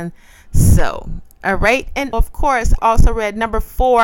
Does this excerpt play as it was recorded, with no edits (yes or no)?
no